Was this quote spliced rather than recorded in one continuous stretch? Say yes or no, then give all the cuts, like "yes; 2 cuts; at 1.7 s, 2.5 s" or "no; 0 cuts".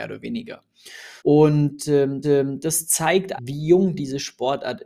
yes; 3 cuts; at 1.2 s, 2.2 s, 3.4 s